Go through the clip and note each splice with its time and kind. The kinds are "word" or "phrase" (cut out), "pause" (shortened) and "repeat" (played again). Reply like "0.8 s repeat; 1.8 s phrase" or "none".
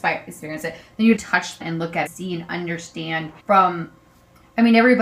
1.2 s phrase; 1.6 s word; 2.1 s phrase; 3.4 s pause